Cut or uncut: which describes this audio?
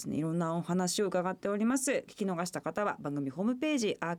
uncut